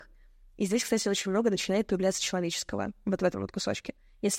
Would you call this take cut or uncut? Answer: uncut